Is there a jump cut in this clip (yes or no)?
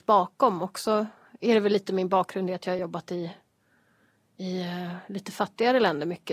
no